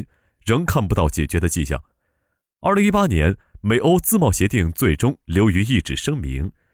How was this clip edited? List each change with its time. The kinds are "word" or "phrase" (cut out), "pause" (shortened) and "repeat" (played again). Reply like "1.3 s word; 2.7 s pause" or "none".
none